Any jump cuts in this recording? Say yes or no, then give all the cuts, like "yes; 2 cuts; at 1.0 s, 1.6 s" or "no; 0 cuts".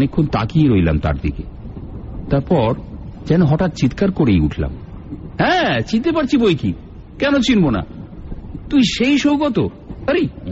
no; 0 cuts